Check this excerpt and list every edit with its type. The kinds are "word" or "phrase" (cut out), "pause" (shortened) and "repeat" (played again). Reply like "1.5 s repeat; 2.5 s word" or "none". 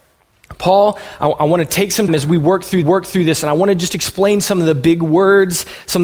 2.1 s word; 2.8 s repeat